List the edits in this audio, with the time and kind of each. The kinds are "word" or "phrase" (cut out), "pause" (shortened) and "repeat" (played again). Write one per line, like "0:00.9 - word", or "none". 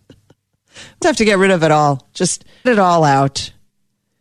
0:01.0 - word
0:02.7 - word